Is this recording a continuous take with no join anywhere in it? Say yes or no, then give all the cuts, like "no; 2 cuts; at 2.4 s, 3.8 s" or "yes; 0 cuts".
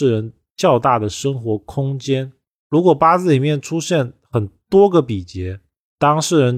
yes; 0 cuts